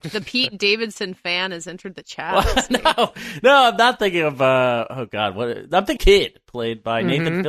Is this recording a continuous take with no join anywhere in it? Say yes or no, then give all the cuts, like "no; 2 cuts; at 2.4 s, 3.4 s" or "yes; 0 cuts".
no; 1 cut; at 6.0 s